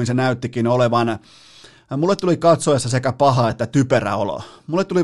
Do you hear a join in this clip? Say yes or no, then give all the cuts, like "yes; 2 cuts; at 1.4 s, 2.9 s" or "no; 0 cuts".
no; 0 cuts